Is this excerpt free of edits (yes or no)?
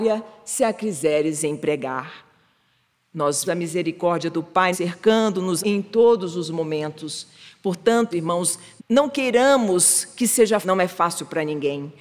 no